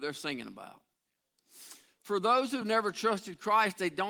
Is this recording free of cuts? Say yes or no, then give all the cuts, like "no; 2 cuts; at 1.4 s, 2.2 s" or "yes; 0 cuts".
yes; 0 cuts